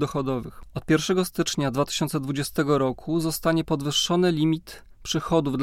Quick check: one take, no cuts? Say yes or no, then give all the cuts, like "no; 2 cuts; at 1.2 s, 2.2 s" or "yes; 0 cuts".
yes; 0 cuts